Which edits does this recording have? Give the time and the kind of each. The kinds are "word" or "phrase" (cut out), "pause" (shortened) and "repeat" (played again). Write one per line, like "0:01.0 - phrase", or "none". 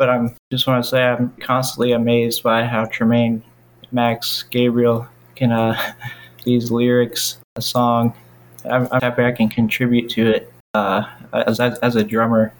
0:01.4 - word
0:06.4 - phrase
0:07.4 - phrase
0:09.0 - word